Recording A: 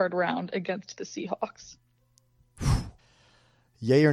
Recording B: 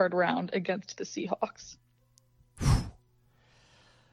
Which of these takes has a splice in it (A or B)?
A